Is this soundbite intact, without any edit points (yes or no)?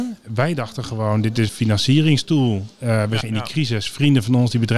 no